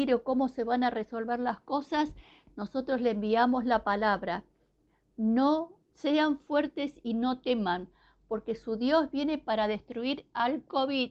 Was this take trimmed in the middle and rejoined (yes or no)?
no